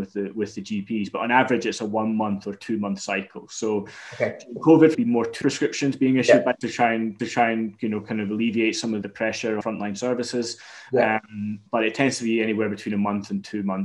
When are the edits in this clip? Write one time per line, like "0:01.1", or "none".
0:04.9
0:05.4
0:06.6
0:07.2
0:09.0
0:09.6
0:11.7